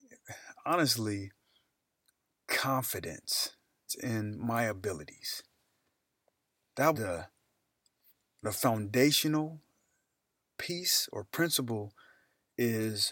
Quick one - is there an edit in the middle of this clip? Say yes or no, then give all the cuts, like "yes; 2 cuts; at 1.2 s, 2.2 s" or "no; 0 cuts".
yes; 3 cuts; at 3.9 s, 6.9 s, 8.4 s